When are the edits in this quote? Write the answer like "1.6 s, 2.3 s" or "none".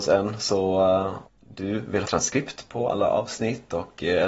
1.3 s, 2.0 s